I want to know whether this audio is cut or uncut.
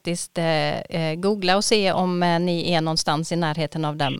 uncut